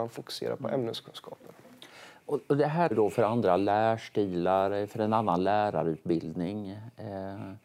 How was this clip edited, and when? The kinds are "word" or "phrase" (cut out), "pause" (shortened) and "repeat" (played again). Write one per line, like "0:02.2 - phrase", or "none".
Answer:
0:02.9 - word